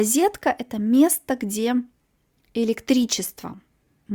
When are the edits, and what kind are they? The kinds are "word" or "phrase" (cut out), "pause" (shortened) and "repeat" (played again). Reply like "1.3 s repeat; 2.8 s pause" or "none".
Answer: none